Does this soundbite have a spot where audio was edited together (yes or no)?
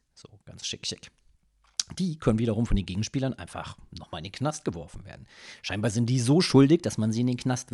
no